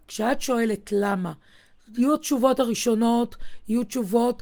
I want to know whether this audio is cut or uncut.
uncut